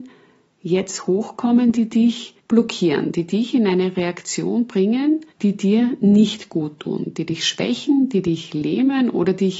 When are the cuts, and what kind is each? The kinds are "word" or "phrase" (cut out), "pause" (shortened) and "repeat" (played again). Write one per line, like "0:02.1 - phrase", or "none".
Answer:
0:02.4 - pause
0:05.3 - pause